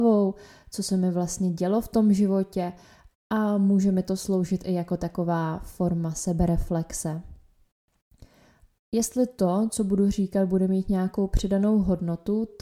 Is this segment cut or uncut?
uncut